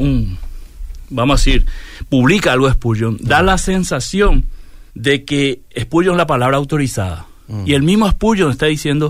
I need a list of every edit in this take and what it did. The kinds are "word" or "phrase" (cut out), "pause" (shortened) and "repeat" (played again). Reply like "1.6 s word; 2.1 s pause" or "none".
4.9 s pause

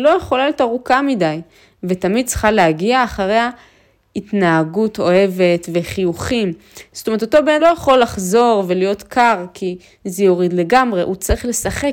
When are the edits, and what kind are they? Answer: 7.6 s phrase

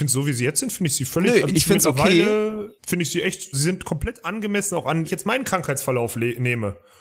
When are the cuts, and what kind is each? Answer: 1.5 s word; 2.8 s pause; 3.5 s word; 5.0 s word

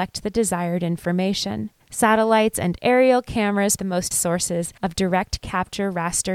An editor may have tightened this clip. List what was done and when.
1.8 s pause; 3.8 s word; 4.1 s word; 4.8 s pause

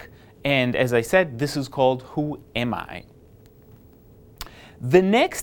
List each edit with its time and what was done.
none

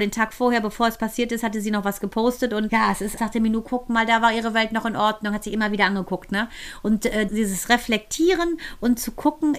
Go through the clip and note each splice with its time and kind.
2.7 s word; 3.2 s word; 7.3 s word

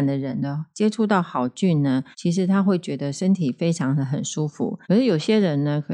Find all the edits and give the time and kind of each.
2.1 s pause; 4.8 s pause

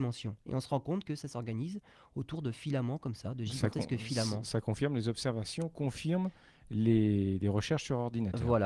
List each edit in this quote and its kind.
none

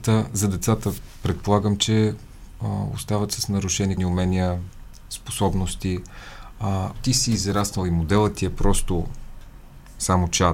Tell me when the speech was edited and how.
4.0 s word; 7.0 s word

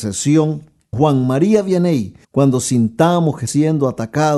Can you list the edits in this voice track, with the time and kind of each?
0.9 s phrase; 2.2 s pause; 3.5 s word

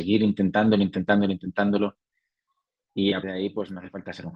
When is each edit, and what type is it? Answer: 3.2 s word

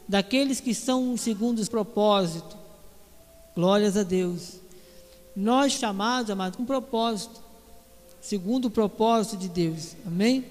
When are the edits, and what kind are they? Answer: 1.2 s word; 1.7 s word; 5.8 s word; 6.6 s word

